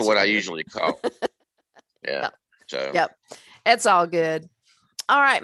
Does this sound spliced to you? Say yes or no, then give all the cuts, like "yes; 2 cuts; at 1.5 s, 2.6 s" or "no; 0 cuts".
no; 0 cuts